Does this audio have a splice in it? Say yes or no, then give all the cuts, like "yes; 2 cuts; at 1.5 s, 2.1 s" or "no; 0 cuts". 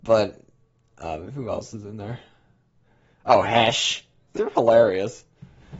yes; 1 cut; at 4.3 s